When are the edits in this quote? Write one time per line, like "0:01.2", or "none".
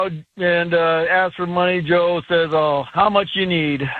none